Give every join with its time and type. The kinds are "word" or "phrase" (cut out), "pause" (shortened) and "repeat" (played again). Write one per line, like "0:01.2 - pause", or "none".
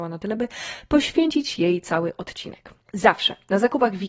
0:02.8 - pause